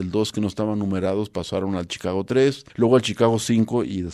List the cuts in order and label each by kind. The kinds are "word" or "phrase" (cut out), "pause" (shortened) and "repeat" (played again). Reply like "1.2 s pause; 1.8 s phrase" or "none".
2.7 s pause

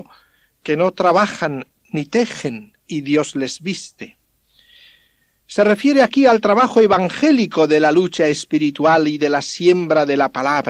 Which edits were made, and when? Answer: 2.8 s pause

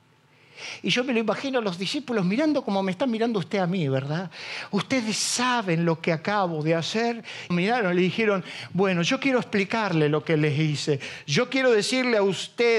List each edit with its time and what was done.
7.5 s phrase

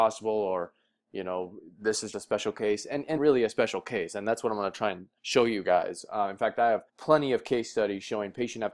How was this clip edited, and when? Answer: 2.1 s word; 3.2 s phrase; 5.2 s pause; 6.9 s pause

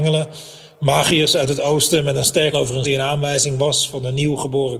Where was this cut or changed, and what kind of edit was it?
2.5 s word; 2.8 s word

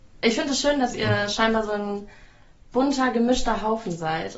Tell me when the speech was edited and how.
none

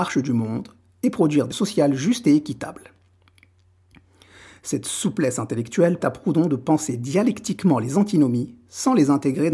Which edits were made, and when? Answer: 1.5 s word; 6.0 s word

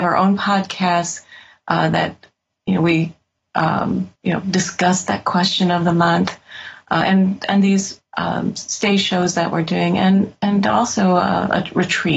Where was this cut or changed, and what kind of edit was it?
4.2 s pause

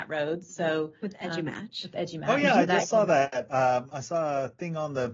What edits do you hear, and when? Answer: none

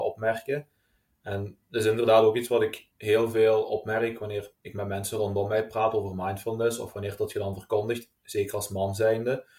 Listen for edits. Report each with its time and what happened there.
2.9 s pause; 4.5 s pause

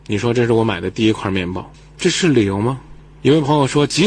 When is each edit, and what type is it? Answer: none

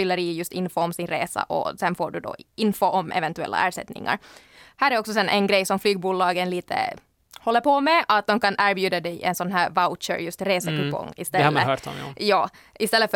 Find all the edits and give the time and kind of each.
none

